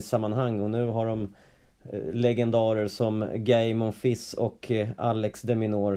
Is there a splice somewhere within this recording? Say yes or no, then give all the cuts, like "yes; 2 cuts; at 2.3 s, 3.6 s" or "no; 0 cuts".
no; 0 cuts